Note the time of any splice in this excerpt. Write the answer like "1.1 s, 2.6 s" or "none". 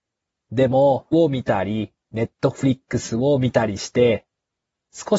1.1 s, 2.0 s